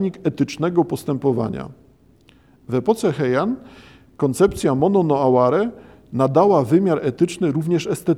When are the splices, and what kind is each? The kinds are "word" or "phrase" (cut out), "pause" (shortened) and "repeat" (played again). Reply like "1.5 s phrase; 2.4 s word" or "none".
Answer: none